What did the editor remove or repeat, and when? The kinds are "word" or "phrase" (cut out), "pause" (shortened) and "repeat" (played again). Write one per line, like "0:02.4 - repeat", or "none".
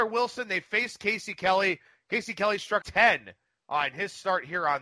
0:02.8 - word

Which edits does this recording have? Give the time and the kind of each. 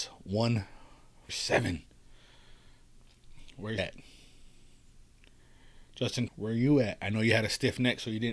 0:01.3 - word
0:03.8 - word
0:06.3 - word

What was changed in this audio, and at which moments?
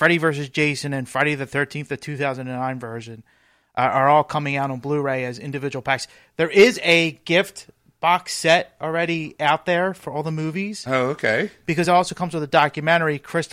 none

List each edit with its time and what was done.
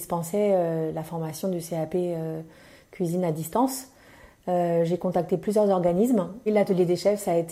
none

